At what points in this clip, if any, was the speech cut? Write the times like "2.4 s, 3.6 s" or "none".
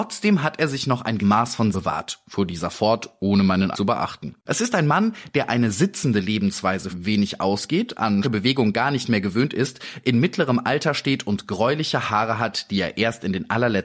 1.2 s, 1.7 s, 3.7 s, 4.4 s, 6.9 s, 8.2 s